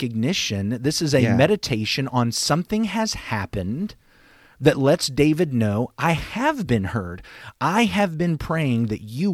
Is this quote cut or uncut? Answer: uncut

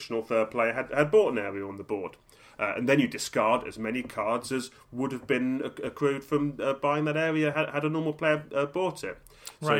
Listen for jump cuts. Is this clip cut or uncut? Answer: uncut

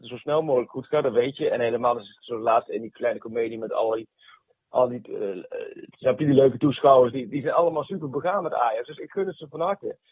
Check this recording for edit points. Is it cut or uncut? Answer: uncut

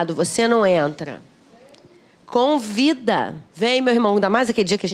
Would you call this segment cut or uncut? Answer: cut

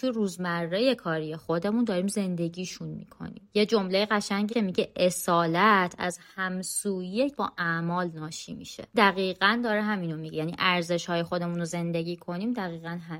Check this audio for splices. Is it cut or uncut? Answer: cut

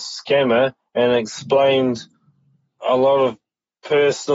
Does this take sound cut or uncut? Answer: uncut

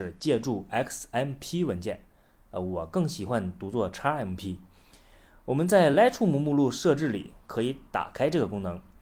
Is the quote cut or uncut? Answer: uncut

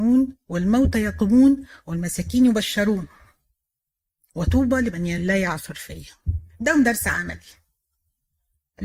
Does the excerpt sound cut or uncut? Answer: uncut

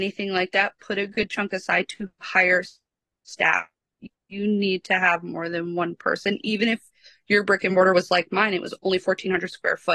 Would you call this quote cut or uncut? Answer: uncut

